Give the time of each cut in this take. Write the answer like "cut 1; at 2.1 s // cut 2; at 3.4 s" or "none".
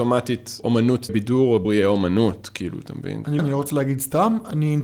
cut 1; at 1.1 s // cut 2; at 1.6 s // cut 3; at 3.4 s